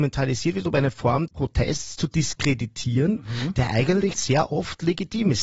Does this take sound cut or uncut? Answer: cut